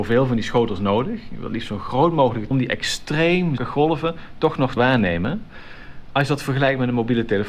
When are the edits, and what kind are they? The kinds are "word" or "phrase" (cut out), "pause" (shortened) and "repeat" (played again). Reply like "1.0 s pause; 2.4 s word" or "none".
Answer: 2.5 s phrase; 3.6 s word; 4.8 s word